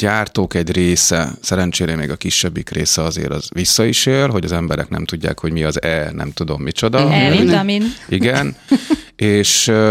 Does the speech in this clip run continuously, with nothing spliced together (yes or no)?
yes